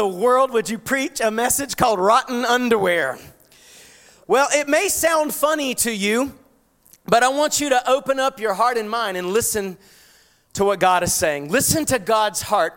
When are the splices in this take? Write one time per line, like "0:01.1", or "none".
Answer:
none